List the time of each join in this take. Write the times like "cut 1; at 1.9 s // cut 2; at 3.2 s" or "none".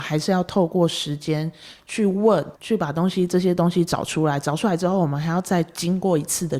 cut 1; at 2.6 s